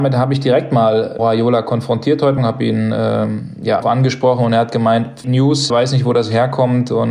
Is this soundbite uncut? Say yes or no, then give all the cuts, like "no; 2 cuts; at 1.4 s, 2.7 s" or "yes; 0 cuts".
no; 5 cuts; at 1.2 s, 2.4 s, 3.8 s, 5.2 s, 5.7 s